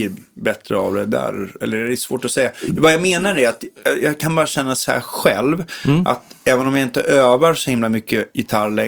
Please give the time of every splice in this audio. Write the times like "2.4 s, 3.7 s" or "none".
none